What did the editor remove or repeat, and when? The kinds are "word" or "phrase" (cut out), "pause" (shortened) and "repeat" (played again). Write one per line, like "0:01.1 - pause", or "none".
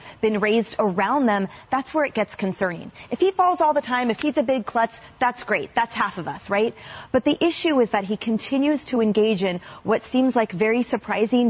none